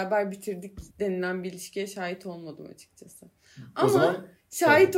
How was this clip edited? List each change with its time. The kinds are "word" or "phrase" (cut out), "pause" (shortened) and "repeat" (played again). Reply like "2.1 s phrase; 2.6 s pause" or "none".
0.9 s pause